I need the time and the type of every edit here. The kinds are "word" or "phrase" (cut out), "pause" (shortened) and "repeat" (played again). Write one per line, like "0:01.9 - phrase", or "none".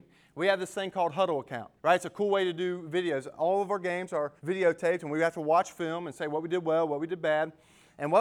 0:01.8 - pause
0:04.4 - pause